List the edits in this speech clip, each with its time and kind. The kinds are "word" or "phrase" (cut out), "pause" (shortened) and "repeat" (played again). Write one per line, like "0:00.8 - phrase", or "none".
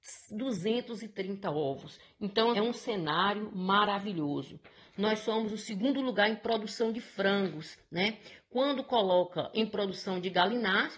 0:02.5 - word